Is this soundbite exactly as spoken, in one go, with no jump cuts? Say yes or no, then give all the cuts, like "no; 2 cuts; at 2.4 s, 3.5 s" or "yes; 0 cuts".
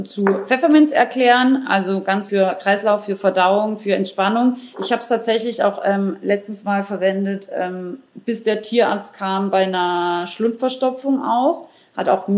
no; 1 cut; at 2.3 s